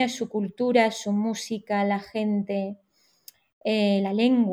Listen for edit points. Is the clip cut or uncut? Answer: uncut